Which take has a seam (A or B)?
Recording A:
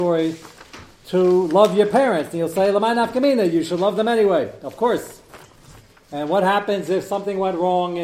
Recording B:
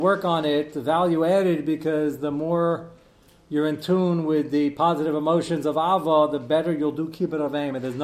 A